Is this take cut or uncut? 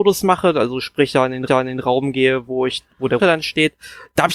cut